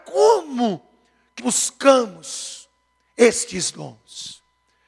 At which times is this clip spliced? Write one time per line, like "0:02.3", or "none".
0:01.4